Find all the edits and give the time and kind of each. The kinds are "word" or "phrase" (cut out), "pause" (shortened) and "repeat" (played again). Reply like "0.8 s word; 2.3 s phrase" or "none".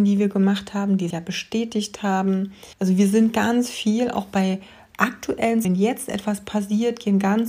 1.1 s word; 2.7 s pause; 5.6 s word